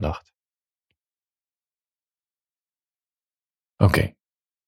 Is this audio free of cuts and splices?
yes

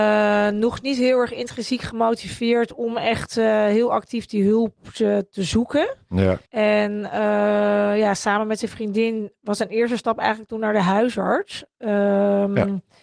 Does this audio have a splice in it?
yes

